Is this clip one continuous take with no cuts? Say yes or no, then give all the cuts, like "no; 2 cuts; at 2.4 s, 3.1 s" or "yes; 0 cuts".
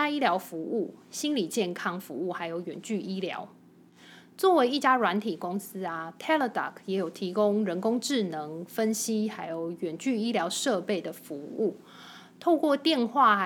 yes; 0 cuts